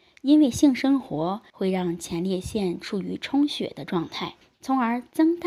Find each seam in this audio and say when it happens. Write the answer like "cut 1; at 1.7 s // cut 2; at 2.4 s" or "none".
cut 1; at 1.5 s // cut 2; at 4.4 s